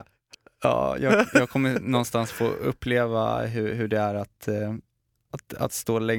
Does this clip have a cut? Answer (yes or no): no